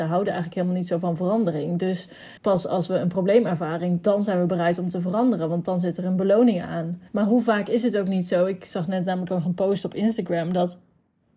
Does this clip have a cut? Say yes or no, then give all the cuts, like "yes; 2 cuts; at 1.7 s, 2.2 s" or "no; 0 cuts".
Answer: yes; 2 cuts; at 2.4 s, 7.1 s